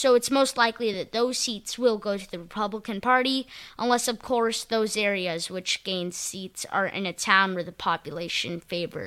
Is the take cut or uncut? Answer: uncut